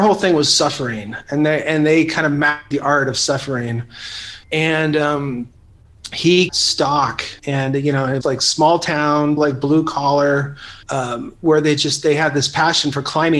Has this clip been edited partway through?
yes; 7 cuts; at 2.7 s, 4.4 s, 6.5 s, 7.4 s, 8.2 s, 9.4 s, 10.8 s

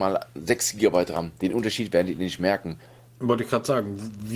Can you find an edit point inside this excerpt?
no; 0 cuts

